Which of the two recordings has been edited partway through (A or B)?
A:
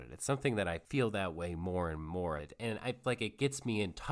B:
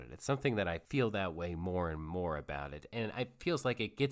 A